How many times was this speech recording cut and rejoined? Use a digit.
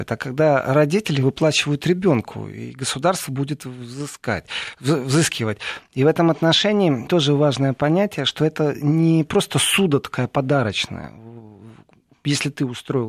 1